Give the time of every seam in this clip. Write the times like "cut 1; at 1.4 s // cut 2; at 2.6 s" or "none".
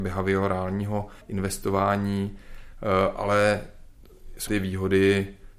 cut 1; at 1.2 s // cut 2; at 4.5 s

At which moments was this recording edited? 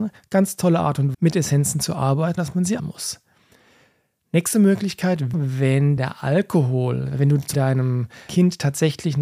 cut 1; at 1.1 s // cut 2; at 2.4 s // cut 3; at 2.8 s // cut 4; at 5.3 s // cut 5; at 6.0 s // cut 6; at 7.5 s // cut 7; at 8.3 s

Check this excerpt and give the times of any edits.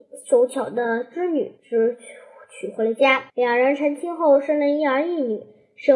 cut 1; at 1.6 s // cut 2; at 3.3 s

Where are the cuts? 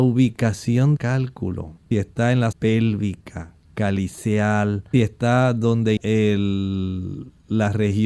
cut 1; at 1.0 s // cut 2; at 1.9 s // cut 3; at 2.5 s // cut 4; at 4.9 s // cut 5; at 6.0 s

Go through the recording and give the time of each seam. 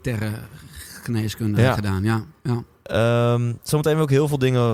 none

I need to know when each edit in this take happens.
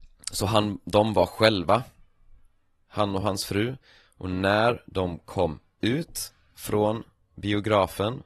none

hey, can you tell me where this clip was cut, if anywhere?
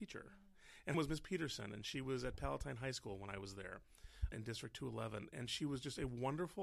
cut 1; at 0.9 s // cut 2; at 4.3 s

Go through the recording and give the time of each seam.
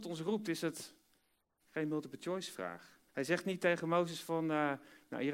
cut 1; at 3.1 s

